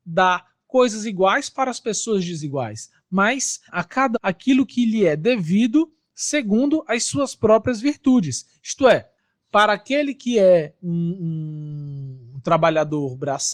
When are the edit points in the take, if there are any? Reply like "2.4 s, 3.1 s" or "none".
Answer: 3.7 s, 4.1 s